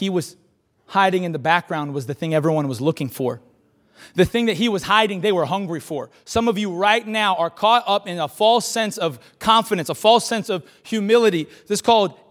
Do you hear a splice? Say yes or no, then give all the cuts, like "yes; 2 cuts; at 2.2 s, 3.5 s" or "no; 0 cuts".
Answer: no; 0 cuts